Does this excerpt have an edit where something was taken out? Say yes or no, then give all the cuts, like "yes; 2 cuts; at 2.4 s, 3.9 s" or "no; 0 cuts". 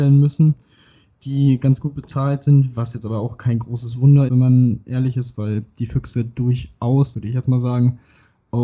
yes; 2 cuts; at 4.3 s, 7.1 s